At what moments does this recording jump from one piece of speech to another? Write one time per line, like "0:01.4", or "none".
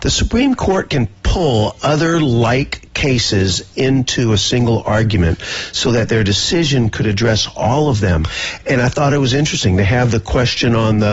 none